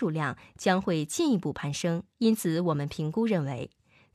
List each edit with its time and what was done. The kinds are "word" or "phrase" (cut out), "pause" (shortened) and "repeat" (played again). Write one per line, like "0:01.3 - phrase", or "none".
0:02.1 - pause